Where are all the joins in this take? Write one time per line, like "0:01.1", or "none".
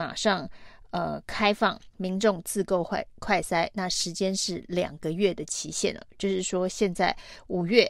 0:01.9

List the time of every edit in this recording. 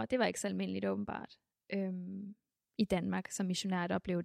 none

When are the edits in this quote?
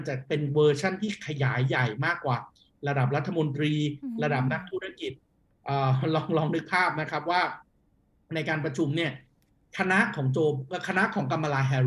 none

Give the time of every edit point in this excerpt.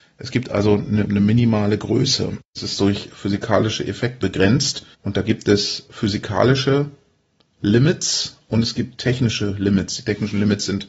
0:01.0
0:04.2
0:04.9

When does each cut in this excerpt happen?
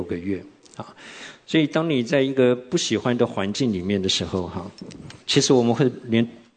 0:05.2

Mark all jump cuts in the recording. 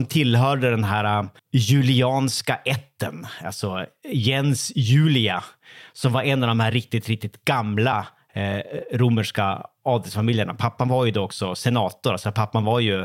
0:01.4

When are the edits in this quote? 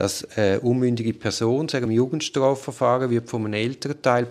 0:01.9

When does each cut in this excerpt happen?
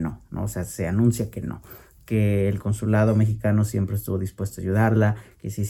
none

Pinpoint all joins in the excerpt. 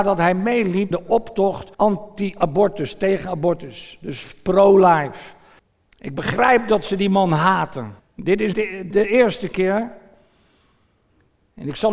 0:00.9
0:01.7
0:05.6
0:08.0
0:08.5
0:08.9

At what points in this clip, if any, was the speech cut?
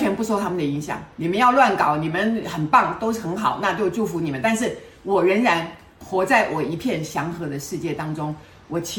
0:01.1

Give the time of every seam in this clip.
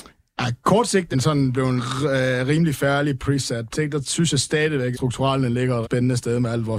0:01.1
0:01.8
0:03.7
0:04.9
0:05.8

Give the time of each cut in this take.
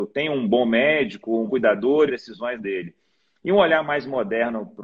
0:01.5
0:02.1
0:02.6

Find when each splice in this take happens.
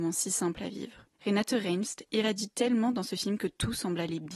0:01.1

